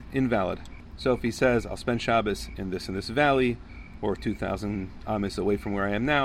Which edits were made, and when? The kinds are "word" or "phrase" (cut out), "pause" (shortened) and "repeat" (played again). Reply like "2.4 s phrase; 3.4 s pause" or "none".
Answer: none